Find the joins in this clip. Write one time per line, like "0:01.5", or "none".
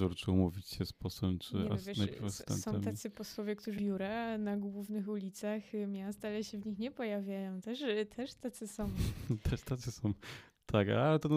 0:03.8